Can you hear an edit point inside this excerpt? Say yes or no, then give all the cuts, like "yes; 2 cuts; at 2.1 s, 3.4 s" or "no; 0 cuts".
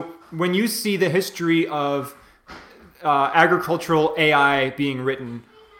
no; 0 cuts